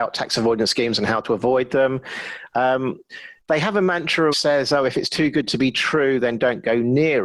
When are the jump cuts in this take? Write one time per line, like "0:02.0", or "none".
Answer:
0:04.3

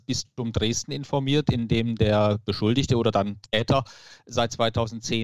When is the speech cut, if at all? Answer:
none

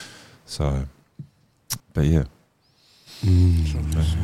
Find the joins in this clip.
0:01.8

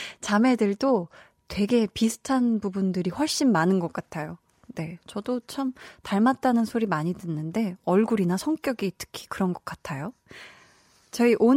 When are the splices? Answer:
none

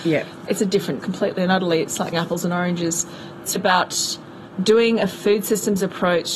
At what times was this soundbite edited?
0:01.0
0:02.1
0:03.6

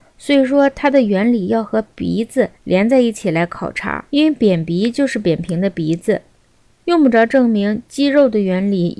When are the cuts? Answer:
0:02.5
0:04.1

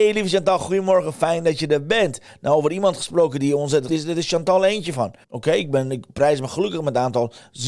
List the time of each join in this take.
0:03.9
0:05.2

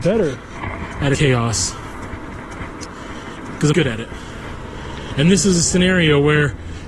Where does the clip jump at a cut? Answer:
0:01.1
0:03.7

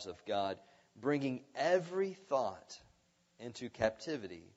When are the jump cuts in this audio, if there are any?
none

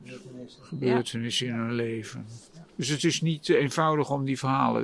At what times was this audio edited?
0:02.7

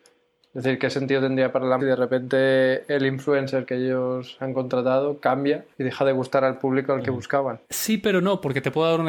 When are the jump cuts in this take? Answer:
0:01.8
0:05.7
0:07.6

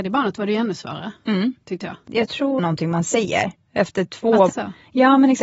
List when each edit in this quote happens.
0:02.6
0:04.5

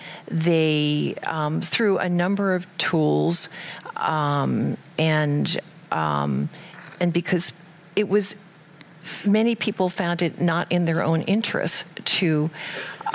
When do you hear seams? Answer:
none

